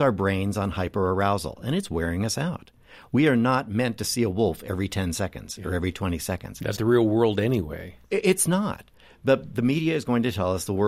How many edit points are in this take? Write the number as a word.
one